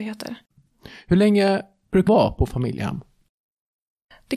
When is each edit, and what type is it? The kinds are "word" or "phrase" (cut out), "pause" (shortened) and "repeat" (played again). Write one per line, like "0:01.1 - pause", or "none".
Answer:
0:02.1 - word